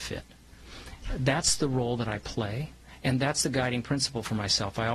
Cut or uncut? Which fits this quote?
uncut